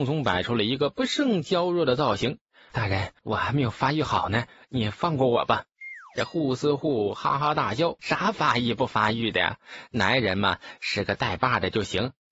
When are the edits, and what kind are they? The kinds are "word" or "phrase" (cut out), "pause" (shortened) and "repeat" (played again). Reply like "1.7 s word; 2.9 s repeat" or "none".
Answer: 2.7 s word; 3.2 s pause; 8.0 s phrase

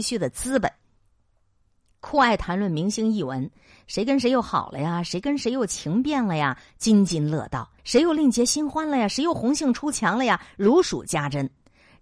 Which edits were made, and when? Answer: 7.8 s pause

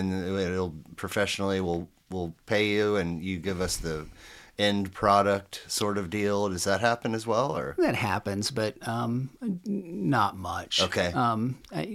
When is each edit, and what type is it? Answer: none

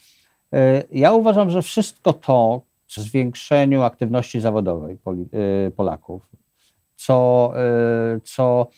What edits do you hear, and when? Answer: 3.0 s word

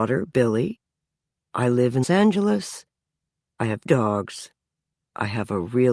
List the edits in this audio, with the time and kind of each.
2.0 s word; 3.9 s word

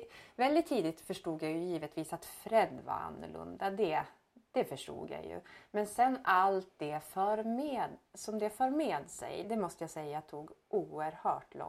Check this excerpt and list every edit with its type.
9.4 s word

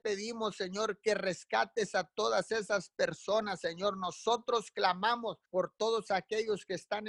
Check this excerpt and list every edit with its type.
5.4 s pause

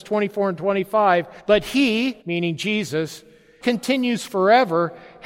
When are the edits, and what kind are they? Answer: 1.4 s pause; 2.2 s pause; 3.6 s phrase

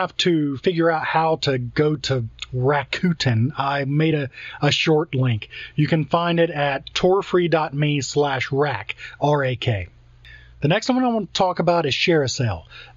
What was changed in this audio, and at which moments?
none

